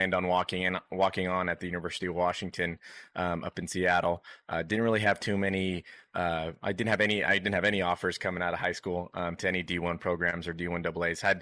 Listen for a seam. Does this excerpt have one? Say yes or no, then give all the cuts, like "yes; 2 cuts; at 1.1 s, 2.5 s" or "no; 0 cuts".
no; 0 cuts